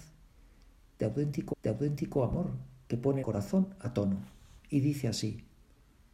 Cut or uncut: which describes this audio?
cut